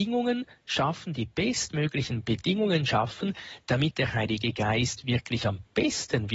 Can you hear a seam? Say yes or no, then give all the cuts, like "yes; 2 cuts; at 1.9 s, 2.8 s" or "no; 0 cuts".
no; 0 cuts